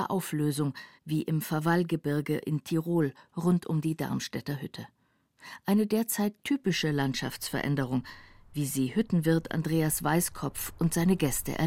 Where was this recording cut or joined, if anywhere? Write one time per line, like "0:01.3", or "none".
0:01.0

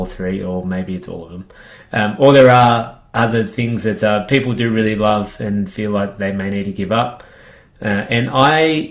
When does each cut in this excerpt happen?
none

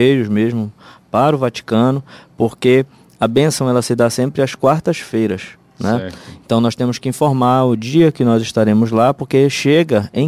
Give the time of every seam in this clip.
none

